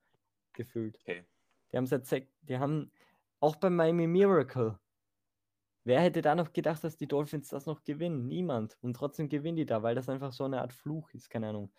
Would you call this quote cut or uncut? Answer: uncut